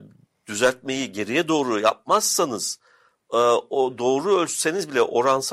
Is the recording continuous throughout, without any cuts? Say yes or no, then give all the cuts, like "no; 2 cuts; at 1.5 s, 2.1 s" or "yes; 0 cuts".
yes; 0 cuts